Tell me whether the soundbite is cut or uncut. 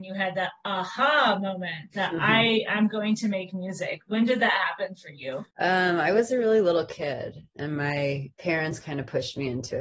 uncut